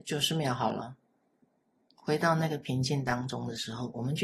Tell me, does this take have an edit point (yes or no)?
no